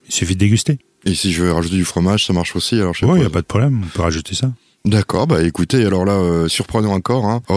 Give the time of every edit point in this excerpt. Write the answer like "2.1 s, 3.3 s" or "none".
none